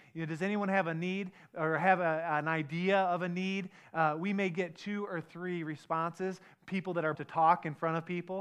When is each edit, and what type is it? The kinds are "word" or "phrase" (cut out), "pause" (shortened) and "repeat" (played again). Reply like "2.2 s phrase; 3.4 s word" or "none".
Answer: 7.1 s phrase

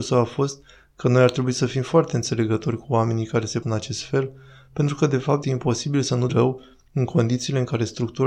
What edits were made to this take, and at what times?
3.6 s word; 5.4 s word; 6.3 s word

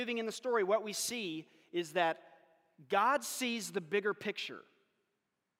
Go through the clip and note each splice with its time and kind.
none

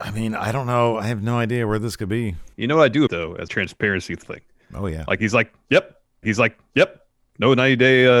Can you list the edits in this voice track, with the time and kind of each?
2.5 s pause; 3.1 s word; 3.5 s phrase; 4.2 s phrase; 6.2 s repeat

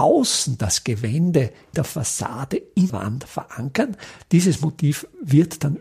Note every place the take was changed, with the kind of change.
1.7 s word; 2.9 s word

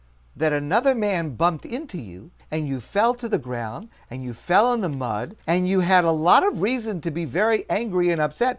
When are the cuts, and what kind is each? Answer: 2.4 s pause; 5.4 s pause

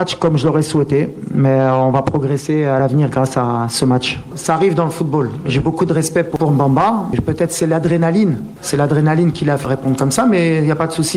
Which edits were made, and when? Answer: none

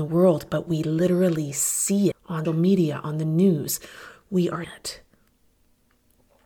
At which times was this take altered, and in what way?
2.1 s word; 2.5 s word; 4.6 s word

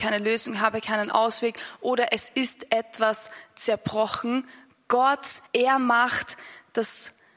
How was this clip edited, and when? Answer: 5.5 s pause

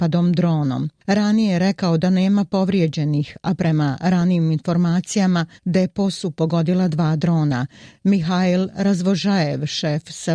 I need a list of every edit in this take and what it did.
5.6 s pause

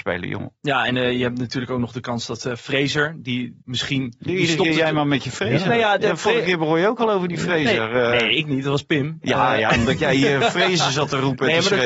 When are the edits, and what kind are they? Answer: 3.6 s pause; 4.3 s word

